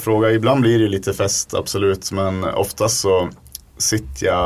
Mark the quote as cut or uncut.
uncut